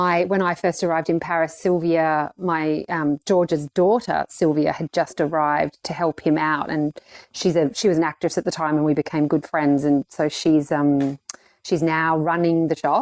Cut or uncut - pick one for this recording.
uncut